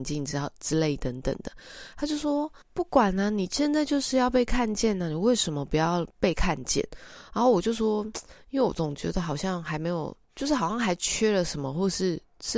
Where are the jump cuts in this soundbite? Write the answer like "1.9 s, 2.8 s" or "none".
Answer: 2.6 s, 6.1 s, 10.2 s